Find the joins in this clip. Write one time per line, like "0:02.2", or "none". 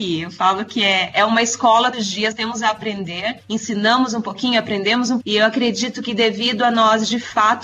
0:01.9
0:02.3
0:05.2